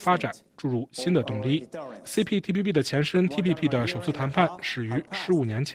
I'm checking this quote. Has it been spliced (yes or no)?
no